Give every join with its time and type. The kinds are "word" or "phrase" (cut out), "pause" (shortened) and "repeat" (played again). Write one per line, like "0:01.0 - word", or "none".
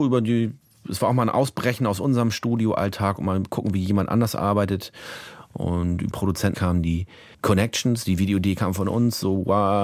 0:06.1 - word
0:06.5 - word